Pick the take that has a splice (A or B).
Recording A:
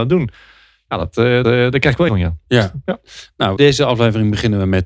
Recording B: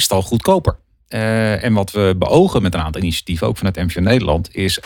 A